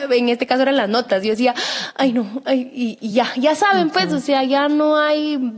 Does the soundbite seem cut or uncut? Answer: uncut